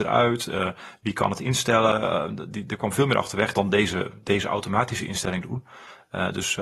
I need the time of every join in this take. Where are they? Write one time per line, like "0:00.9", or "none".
none